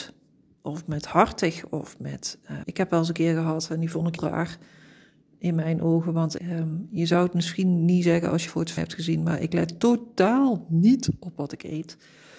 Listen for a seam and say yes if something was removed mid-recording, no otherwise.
yes